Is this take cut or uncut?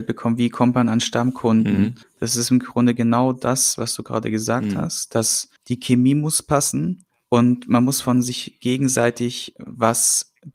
cut